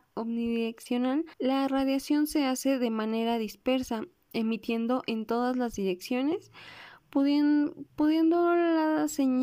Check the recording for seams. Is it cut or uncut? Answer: cut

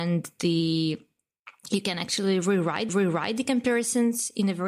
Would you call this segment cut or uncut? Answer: cut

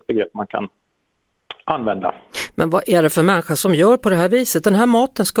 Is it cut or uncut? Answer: uncut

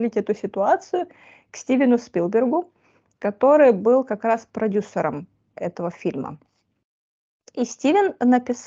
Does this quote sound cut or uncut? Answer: uncut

